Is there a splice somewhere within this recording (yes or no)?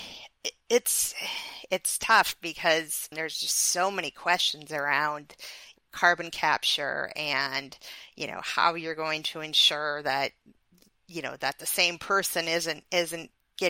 no